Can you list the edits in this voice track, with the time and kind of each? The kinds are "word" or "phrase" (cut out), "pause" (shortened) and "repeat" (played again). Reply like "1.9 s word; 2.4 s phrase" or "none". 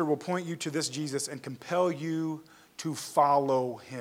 none